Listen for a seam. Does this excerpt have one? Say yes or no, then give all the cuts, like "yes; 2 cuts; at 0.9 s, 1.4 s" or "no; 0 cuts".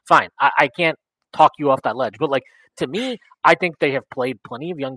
no; 0 cuts